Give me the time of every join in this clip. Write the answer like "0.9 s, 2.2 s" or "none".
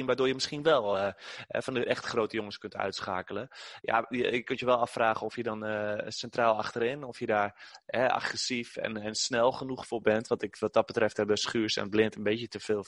none